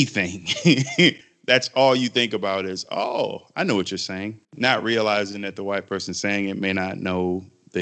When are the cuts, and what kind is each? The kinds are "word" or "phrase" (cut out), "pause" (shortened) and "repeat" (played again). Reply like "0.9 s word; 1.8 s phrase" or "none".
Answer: 1.2 s pause; 4.4 s pause

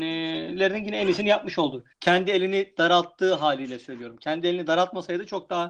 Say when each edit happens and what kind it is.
1.9 s pause

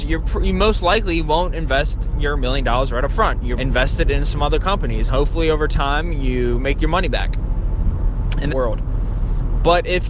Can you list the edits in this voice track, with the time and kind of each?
3.6 s word; 5.1 s word; 8.5 s phrase

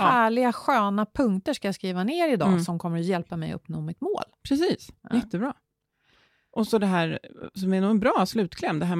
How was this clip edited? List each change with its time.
none

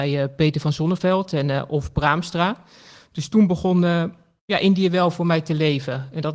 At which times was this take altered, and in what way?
none

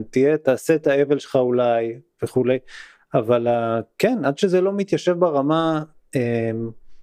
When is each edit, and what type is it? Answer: none

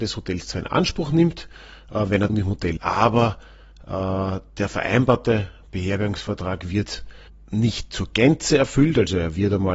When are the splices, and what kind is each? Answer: 2.3 s phrase; 2.8 s word; 7.3 s pause

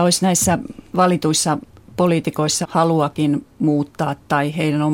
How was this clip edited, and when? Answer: 2.6 s word

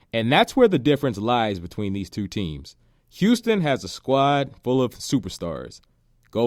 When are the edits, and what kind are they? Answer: none

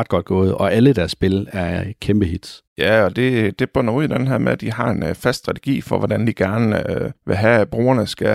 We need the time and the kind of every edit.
2.7 s pause; 7.1 s pause

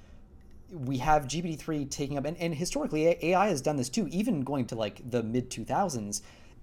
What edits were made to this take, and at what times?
4.7 s word

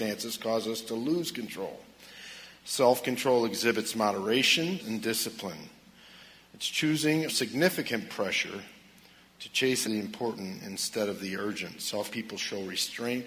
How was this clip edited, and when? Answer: 4.8 s word; 7.3 s word; 9.8 s word; 12.1 s word

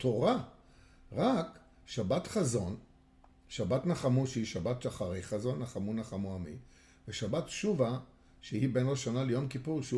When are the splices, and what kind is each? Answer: none

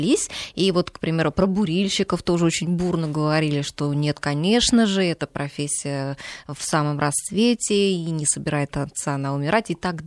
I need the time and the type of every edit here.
none

